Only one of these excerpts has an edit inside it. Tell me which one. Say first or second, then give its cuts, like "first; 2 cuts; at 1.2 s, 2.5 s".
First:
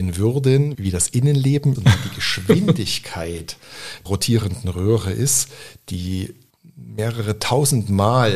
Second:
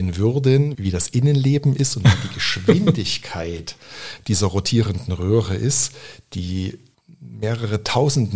first; 2 cuts; at 1.8 s, 4.1 s